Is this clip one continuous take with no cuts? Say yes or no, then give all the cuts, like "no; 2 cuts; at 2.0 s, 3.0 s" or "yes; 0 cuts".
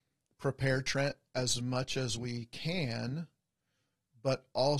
yes; 0 cuts